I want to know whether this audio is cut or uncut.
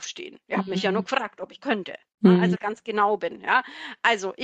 cut